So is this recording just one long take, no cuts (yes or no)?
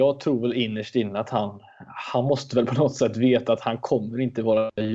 yes